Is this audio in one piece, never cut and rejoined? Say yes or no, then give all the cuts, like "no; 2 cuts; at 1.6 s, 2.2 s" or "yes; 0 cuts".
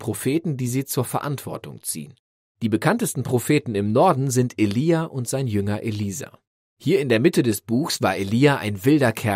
yes; 0 cuts